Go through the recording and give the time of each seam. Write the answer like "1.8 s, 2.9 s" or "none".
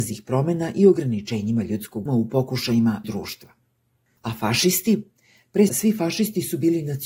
2.1 s, 3.0 s, 5.7 s